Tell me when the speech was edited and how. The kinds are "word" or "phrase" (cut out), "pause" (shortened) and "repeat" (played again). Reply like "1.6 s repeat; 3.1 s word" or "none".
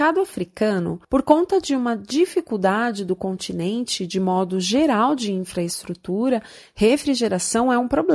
1.0 s pause

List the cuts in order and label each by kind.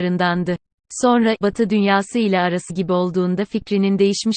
1.4 s phrase; 2.7 s word

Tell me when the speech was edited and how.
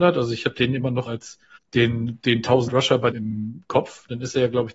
1.1 s word; 1.6 s pause; 2.7 s word; 3.1 s phrase

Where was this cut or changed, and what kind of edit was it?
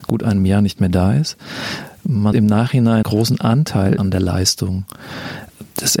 2.3 s word; 3.0 s phrase; 4.0 s word

